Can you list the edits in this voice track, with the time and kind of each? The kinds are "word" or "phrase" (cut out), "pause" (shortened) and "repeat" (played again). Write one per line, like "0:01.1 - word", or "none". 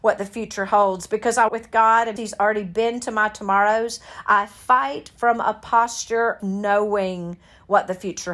0:01.5 - word
0:02.2 - word
0:06.4 - word